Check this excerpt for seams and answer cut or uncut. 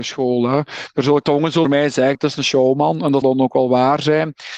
cut